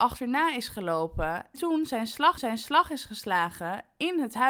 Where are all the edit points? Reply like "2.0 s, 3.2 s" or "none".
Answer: 1.5 s, 2.4 s